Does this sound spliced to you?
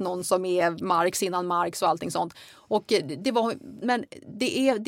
yes; 2 cuts; at 3.2 s, 3.8 s

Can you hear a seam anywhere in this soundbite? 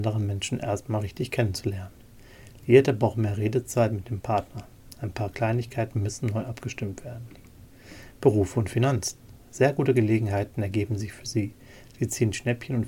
no; 0 cuts

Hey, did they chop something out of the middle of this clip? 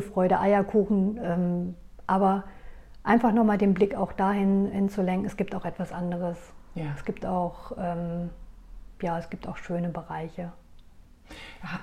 no; 0 cuts

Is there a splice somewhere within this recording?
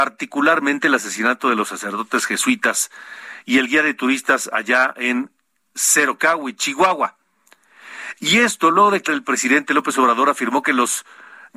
yes; 1 cut; at 9.1 s

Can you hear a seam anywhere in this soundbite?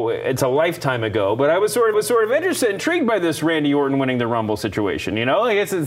yes; 1 cut; at 1.9 s

